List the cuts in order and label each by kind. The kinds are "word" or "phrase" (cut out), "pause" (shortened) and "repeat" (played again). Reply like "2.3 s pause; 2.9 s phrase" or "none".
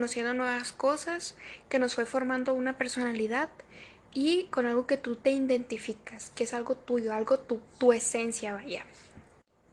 7.7 s pause